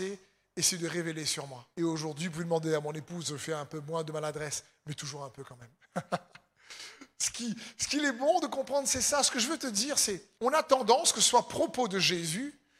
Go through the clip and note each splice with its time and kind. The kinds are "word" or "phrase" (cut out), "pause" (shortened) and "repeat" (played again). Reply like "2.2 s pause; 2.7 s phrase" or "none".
1.7 s pause; 10.3 s pause